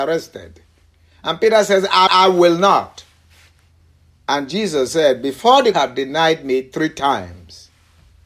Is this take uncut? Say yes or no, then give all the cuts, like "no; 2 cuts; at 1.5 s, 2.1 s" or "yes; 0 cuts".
no; 2 cuts; at 2.1 s, 5.7 s